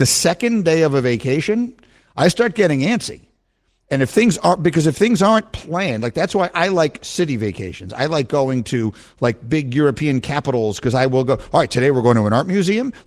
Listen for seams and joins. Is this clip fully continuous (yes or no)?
yes